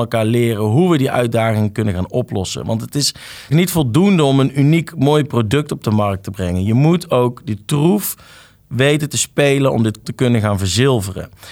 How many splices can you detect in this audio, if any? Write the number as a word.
two